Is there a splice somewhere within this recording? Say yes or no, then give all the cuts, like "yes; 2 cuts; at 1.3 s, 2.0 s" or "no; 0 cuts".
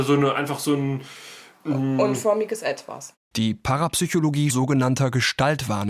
yes; 1 cut; at 4.5 s